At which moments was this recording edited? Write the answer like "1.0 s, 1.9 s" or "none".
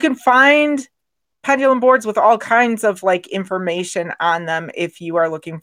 none